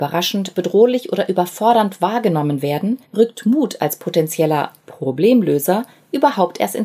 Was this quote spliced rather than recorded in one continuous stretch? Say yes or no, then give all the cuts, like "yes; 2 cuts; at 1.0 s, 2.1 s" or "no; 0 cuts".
yes; 2 cuts; at 3.0 s, 4.8 s